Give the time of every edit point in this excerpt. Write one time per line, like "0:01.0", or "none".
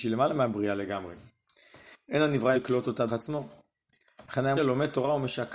0:02.5
0:03.1
0:04.6